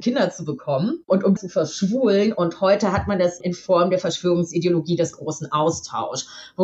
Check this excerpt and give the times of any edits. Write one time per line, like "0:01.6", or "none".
0:01.4
0:03.4